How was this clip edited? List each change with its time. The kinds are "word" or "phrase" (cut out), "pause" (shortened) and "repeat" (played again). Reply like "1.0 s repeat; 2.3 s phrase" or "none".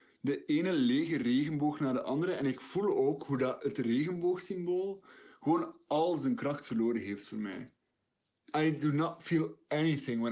none